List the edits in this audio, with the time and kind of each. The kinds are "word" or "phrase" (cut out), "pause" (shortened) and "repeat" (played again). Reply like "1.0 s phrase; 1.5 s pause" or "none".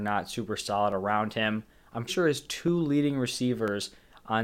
2.1 s word